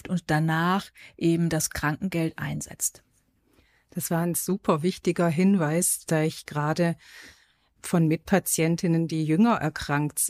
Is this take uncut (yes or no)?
yes